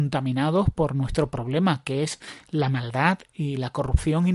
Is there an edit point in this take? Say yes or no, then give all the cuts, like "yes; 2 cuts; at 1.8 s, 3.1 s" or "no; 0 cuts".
no; 0 cuts